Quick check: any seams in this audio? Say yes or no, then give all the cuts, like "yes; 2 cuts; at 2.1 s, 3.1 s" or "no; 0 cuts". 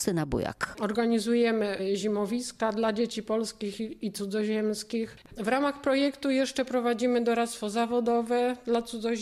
no; 0 cuts